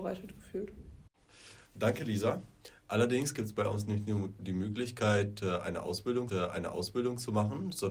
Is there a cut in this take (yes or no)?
yes